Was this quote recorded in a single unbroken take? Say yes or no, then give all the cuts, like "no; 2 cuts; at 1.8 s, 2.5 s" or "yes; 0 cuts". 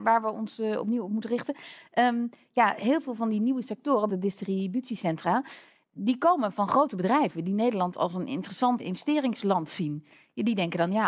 no; 2 cuts; at 4.1 s, 8.8 s